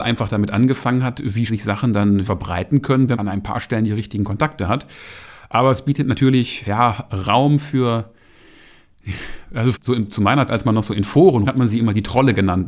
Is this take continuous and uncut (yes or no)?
no